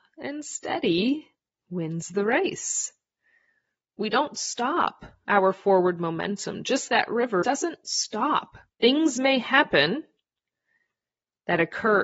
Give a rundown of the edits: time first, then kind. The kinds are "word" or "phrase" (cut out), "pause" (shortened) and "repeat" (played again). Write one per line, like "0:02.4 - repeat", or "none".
0:06.9 - word
0:07.4 - word
0:08.7 - pause